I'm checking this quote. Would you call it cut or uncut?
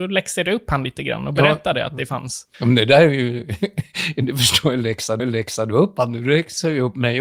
cut